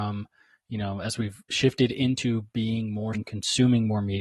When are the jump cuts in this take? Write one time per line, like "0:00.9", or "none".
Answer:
0:03.1